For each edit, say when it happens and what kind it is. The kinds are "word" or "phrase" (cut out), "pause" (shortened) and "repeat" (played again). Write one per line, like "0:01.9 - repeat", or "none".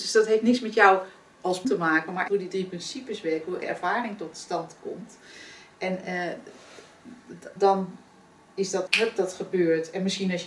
0:01.6 - word
0:02.3 - word
0:03.6 - word
0:07.6 - word
0:08.9 - word